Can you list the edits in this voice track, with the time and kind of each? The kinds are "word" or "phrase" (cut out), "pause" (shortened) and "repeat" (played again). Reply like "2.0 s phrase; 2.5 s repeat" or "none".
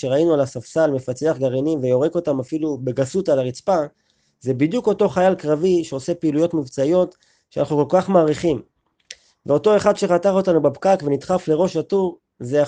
none